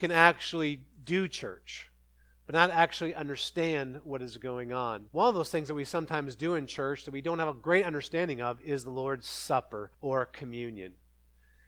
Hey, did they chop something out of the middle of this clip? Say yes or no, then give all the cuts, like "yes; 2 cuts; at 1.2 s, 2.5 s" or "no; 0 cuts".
yes; 3 cuts; at 0.9 s, 5.1 s, 9.9 s